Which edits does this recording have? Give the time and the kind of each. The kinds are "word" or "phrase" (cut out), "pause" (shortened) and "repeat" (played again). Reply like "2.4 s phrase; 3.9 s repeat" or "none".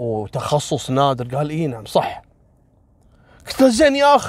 none